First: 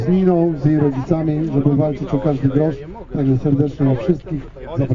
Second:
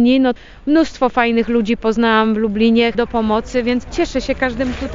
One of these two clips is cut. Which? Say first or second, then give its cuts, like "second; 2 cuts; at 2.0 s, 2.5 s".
second; 1 cut; at 2.9 s